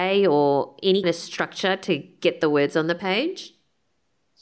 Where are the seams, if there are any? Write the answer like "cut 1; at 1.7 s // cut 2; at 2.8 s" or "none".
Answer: cut 1; at 1.0 s